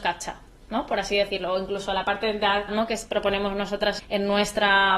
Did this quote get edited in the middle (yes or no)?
yes